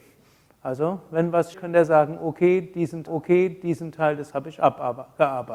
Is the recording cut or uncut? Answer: cut